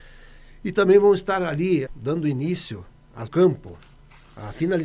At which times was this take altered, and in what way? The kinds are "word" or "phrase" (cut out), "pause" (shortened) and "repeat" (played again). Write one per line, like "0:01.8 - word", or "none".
0:01.9 - word
0:03.3 - phrase